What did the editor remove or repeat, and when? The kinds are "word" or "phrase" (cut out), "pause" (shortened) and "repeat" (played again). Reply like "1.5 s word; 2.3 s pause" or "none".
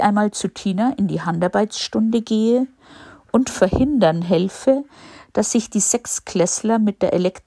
none

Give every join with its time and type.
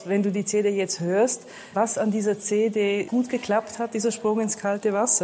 1.7 s word; 3.1 s phrase

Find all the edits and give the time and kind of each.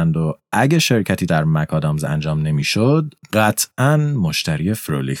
1.3 s word

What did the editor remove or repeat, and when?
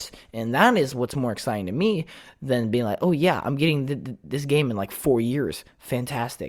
none

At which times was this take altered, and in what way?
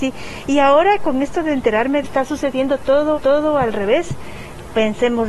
2.0 s phrase; 3.1 s repeat

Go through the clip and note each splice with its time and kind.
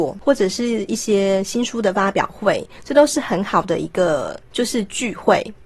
4.4 s pause

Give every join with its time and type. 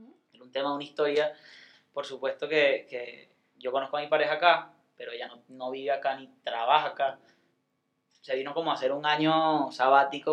none

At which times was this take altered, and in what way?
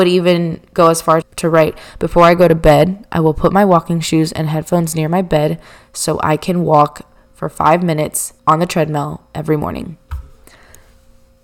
1.2 s word; 8.4 s pause

